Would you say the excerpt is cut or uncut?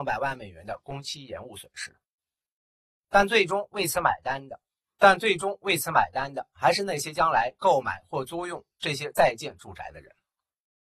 uncut